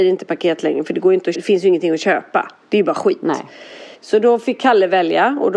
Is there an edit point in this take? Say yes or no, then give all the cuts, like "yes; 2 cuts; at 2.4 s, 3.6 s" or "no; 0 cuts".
yes; 2 cuts; at 1.3 s, 3.9 s